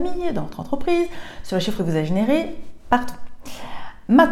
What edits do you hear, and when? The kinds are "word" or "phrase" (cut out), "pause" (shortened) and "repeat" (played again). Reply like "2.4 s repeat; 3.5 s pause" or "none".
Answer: 1.8 s word